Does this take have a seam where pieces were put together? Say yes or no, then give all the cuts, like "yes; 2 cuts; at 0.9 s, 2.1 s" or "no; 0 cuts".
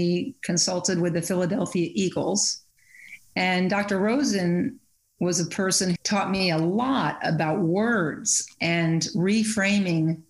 yes; 1 cut; at 6.0 s